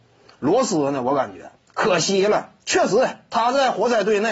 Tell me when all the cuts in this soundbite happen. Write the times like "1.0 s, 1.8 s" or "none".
1.6 s, 2.6 s